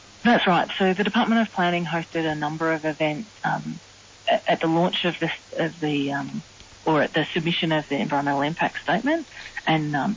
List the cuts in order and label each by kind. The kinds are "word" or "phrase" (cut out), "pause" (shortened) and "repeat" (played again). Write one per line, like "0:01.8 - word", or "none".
0:03.4 - pause